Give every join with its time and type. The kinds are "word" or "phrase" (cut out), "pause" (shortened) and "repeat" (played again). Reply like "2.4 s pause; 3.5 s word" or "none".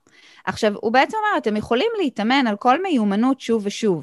none